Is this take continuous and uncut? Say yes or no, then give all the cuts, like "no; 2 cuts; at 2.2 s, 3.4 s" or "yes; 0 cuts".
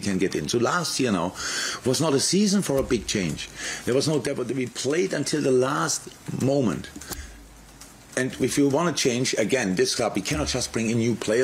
yes; 0 cuts